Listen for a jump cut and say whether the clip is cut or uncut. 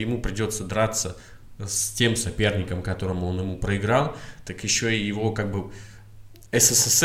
uncut